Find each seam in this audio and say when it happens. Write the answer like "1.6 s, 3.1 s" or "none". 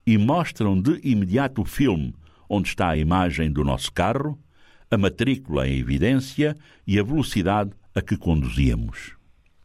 none